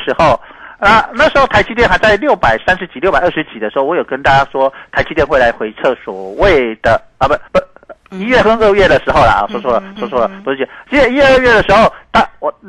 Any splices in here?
yes; 2 cuts; at 7.5 s, 10.0 s

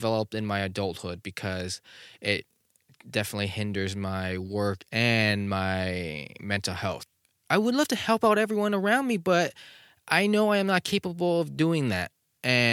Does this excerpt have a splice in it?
no; 0 cuts

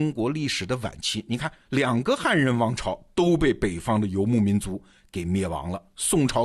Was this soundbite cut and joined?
no; 0 cuts

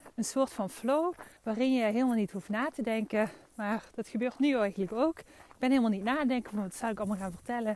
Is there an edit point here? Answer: yes; 1 cut; at 1.4 s

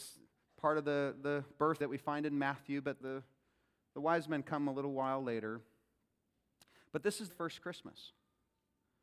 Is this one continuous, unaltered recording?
no; 3 cuts; at 1.8 s, 3.0 s, 7.3 s

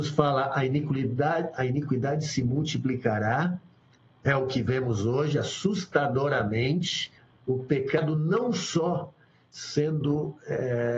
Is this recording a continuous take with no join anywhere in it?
no; 1 cut; at 7.2 s

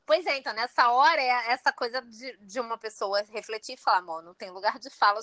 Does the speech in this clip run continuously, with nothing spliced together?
yes; 0 cuts

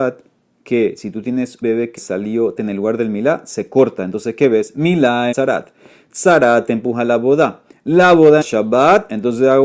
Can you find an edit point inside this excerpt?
yes; 5 cuts; at 1.6 s, 2.0 s, 2.6 s, 5.3 s, 8.4 s

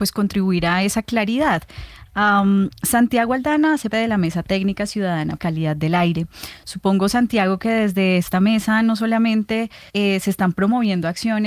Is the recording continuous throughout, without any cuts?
no; 3 cuts; at 3.9 s, 5.4 s, 9.9 s

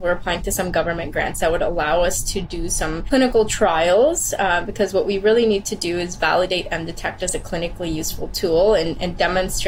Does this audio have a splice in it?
no; 0 cuts

